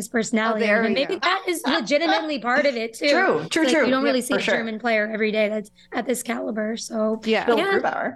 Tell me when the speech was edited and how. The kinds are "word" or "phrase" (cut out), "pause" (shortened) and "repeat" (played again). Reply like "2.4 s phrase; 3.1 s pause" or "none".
none